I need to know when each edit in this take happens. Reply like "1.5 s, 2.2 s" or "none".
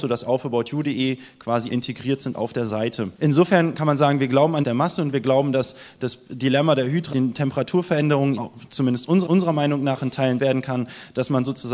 1.7 s, 3.1 s, 4.6 s, 7.1 s, 8.4 s, 9.3 s, 10.4 s